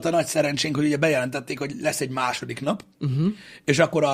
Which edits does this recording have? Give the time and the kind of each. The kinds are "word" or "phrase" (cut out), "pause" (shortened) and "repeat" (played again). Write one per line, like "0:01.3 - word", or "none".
none